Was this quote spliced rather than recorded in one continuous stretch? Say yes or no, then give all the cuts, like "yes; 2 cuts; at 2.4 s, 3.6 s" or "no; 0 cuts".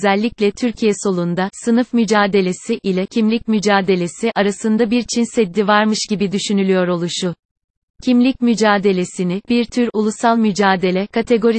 no; 0 cuts